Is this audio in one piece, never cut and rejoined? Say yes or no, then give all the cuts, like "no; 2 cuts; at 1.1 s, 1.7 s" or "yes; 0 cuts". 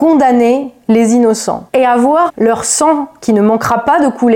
no; 2 cuts; at 1.7 s, 2.3 s